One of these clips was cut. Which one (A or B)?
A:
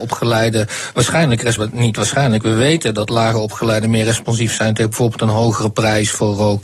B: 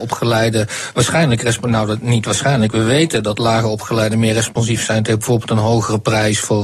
A